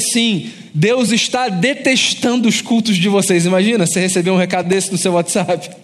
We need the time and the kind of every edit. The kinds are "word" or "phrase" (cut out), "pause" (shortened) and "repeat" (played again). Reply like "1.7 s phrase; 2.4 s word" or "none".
none